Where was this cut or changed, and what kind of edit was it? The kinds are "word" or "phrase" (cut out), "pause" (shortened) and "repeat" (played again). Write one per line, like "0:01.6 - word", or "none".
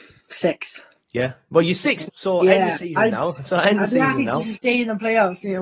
0:01.0 - pause
0:02.1 - word